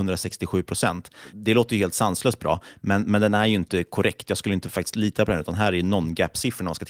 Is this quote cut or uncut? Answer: uncut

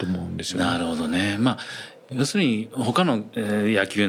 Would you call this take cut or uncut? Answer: uncut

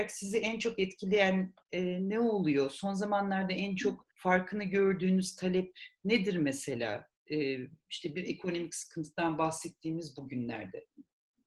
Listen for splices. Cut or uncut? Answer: cut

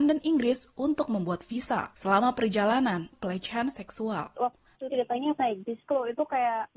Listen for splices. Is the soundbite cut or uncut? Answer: cut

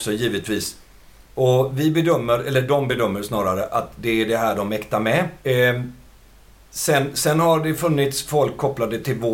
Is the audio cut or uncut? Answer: cut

